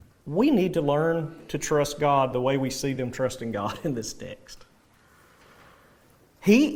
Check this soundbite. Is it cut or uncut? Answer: uncut